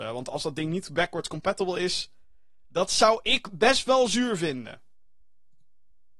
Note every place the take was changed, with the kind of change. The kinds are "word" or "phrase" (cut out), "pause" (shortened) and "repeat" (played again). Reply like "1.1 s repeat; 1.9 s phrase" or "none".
none